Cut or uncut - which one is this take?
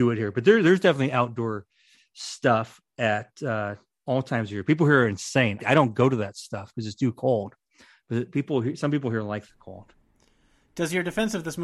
cut